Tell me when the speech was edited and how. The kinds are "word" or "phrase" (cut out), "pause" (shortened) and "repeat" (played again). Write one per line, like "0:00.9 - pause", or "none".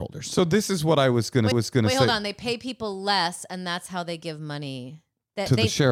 0:01.5 - repeat